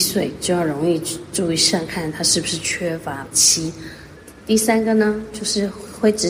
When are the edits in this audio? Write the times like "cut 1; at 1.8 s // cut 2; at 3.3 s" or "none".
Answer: cut 1; at 3.3 s